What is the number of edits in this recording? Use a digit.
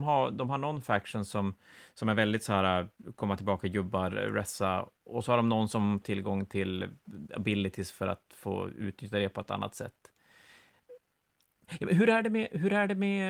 2